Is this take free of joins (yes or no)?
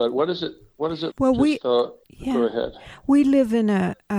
no